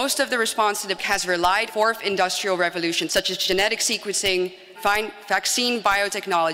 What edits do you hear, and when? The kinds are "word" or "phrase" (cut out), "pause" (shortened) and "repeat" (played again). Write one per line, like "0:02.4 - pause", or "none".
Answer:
0:01.0 - word
0:01.7 - word
0:03.1 - word
0:04.7 - word